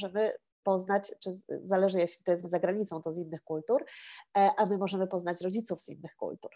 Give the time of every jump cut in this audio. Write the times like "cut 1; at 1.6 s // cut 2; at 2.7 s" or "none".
cut 1; at 2.4 s